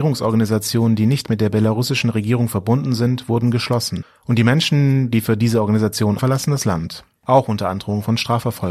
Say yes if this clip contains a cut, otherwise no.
yes